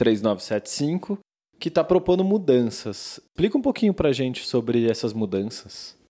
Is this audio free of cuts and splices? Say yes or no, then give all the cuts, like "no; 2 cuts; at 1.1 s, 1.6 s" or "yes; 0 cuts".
yes; 0 cuts